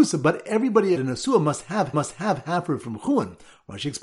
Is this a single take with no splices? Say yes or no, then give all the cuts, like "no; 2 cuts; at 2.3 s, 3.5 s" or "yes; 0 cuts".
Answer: no; 3 cuts; at 1.0 s, 1.9 s, 2.8 s